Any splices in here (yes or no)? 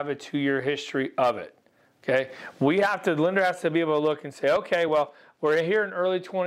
no